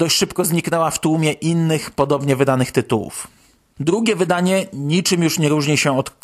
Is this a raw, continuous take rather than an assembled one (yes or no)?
yes